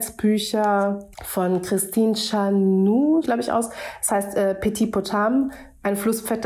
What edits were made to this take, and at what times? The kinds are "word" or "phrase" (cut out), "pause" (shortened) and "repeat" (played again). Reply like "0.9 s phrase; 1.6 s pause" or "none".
1.1 s pause; 3.2 s phrase